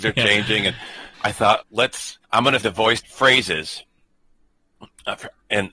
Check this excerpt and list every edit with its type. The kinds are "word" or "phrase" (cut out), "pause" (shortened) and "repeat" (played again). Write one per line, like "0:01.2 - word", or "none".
0:01.1 - pause
0:01.6 - word
0:02.2 - pause
0:02.6 - word
0:03.0 - word